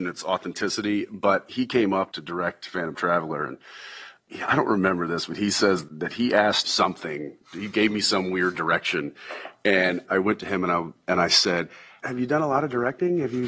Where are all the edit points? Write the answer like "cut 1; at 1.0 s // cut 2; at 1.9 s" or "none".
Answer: cut 1; at 5.8 s // cut 2; at 6.6 s